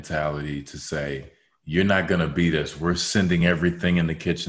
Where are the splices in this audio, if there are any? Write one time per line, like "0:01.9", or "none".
none

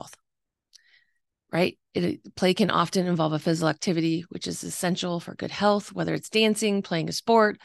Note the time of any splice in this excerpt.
none

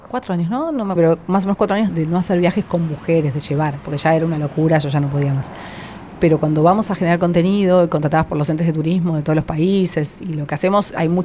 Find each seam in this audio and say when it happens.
0:01.0
0:01.9

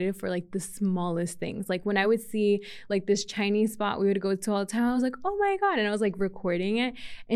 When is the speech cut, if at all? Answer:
none

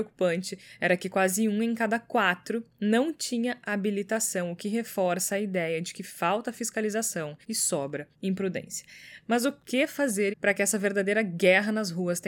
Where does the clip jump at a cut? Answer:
0:07.4
0:08.1
0:10.3

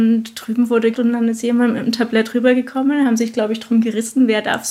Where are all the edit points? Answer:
0:00.9

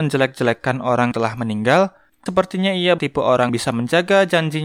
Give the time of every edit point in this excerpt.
0:01.1
0:02.3
0:03.0
0:03.5

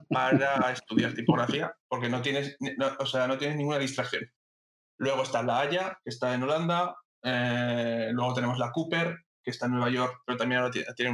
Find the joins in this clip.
none

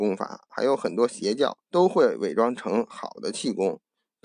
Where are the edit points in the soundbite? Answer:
0:01.6

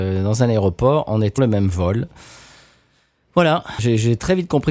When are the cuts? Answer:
0:01.4
0:03.8

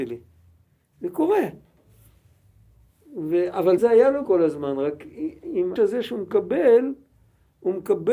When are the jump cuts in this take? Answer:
0:03.8
0:04.2
0:05.8

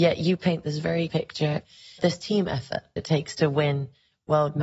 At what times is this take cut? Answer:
0:01.1
0:02.0
0:03.0

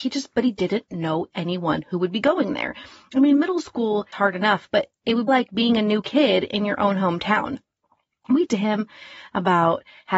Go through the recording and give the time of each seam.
0:04.1
0:05.3
0:08.5

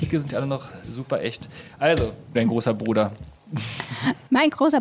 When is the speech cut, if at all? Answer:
0:02.3
0:03.4

